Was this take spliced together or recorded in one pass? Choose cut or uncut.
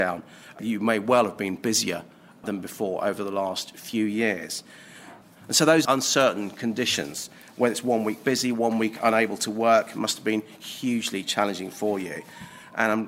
uncut